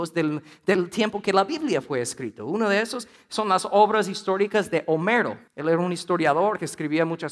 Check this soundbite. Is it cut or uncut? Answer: cut